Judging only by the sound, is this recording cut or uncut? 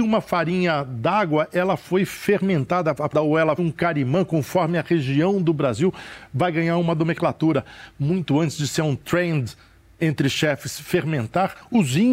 cut